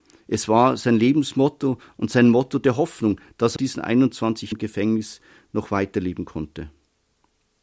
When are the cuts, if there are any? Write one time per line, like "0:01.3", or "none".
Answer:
0:03.6
0:04.5